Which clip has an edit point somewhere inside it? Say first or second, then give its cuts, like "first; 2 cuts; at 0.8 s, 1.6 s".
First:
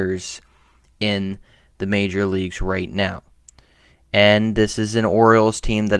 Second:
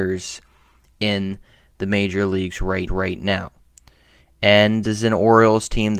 second; 2 cuts; at 2.9 s, 4.8 s